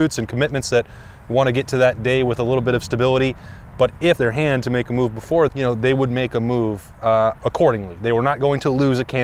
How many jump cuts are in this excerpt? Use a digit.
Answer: 2